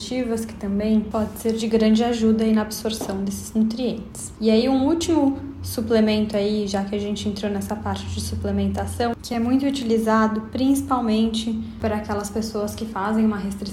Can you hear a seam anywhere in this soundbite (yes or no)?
no